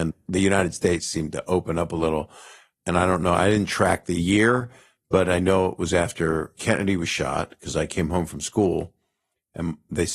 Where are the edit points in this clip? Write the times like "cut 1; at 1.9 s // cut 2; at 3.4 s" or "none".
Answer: none